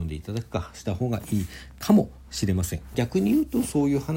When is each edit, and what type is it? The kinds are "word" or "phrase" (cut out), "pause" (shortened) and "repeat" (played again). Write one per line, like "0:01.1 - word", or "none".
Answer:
0:02.9 - phrase